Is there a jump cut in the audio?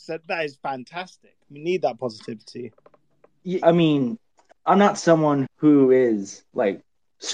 yes; 3 cuts; at 3.6 s, 4.5 s, 5.5 s

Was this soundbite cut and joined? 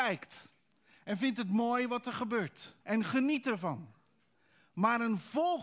yes; 1 cut; at 2.8 s

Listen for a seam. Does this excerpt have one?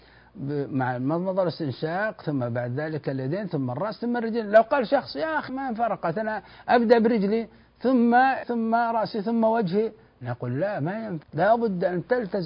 yes; 3 cuts; at 5.5 s, 8.4 s, 11.2 s

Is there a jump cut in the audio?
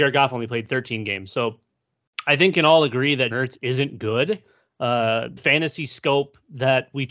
yes; 3 cuts; at 2.5 s, 3.3 s, 5.4 s

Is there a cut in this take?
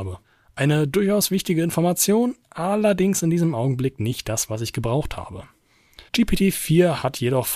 yes; 1 cut; at 6.1 s

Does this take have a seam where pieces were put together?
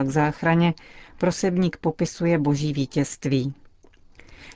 no; 0 cuts

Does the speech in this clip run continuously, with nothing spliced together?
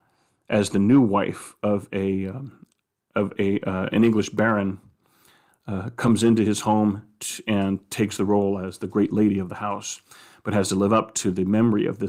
yes; 0 cuts

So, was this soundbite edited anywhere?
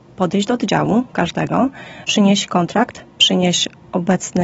yes; 1 cut; at 2.0 s

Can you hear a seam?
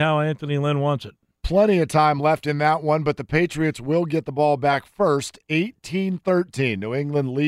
no; 0 cuts

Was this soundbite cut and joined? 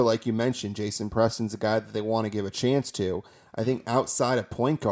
no; 0 cuts

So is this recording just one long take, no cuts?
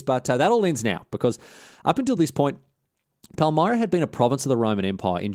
yes; 0 cuts

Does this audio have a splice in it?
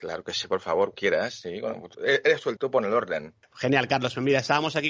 yes; 3 cuts; at 0.9 s, 1.9 s, 2.6 s

